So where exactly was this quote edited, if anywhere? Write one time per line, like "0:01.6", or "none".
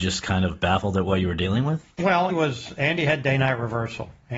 0:02.3